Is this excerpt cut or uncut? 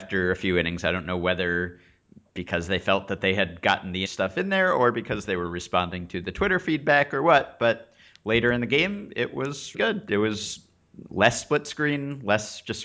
cut